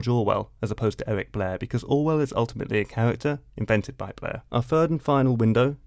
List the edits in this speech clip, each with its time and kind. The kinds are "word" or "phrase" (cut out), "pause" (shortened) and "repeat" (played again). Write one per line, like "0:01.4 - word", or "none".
0:04.5 - pause